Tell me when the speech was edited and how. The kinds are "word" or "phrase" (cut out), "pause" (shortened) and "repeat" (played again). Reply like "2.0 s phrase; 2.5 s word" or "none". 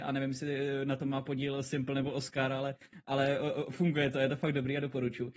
none